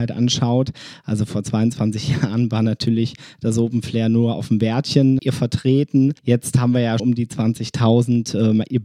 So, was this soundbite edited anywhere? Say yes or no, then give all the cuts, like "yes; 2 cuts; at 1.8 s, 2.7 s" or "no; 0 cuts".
yes; 2 cuts; at 5.2 s, 7.0 s